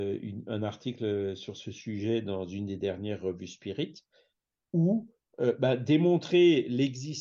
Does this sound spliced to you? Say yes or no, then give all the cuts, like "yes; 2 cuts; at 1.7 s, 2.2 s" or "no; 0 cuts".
no; 0 cuts